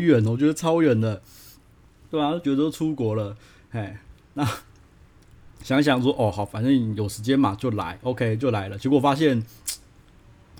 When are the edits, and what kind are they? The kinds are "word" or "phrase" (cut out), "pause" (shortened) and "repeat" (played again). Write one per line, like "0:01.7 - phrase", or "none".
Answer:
none